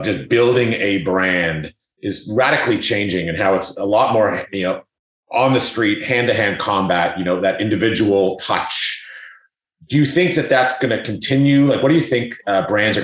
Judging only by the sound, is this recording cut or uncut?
uncut